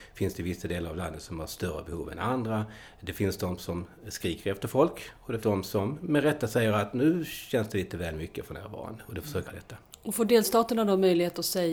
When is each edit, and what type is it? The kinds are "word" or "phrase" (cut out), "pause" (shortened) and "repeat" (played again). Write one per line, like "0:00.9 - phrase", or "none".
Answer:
0:05.4 - word
0:09.4 - phrase

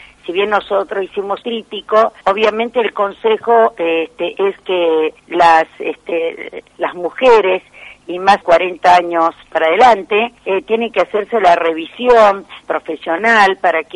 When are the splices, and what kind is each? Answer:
0:01.4 - word
0:02.2 - pause
0:05.2 - pause
0:06.7 - pause
0:08.4 - phrase
0:10.4 - pause
0:12.6 - phrase

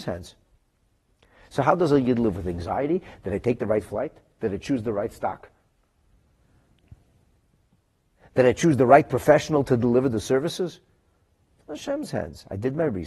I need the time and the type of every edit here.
none

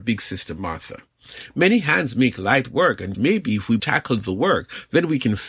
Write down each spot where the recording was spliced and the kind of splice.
0:03.1 - word
0:03.8 - word

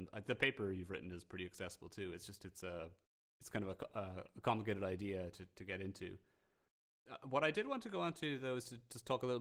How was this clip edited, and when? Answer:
none

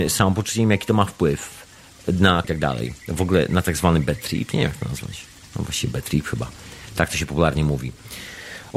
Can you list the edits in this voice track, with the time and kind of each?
0:02.4 - phrase

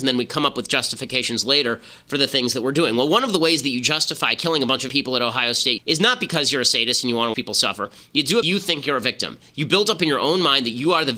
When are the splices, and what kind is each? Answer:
0:04.9 - word
0:05.8 - word
0:07.3 - word
0:08.4 - word

